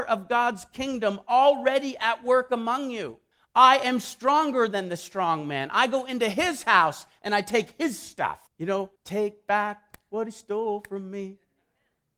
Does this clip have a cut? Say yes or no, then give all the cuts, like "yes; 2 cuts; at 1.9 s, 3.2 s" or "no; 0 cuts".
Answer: yes; 3 cuts; at 3.3 s, 8.5 s, 9.0 s